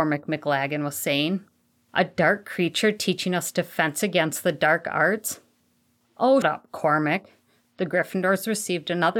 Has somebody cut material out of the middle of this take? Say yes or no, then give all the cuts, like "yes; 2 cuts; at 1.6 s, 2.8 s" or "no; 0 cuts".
yes; 1 cut; at 6.4 s